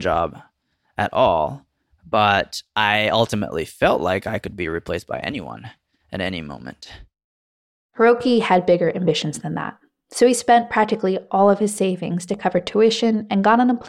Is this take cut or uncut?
uncut